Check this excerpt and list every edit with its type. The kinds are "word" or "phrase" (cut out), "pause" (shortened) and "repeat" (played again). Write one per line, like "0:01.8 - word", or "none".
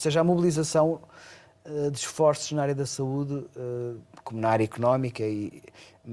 none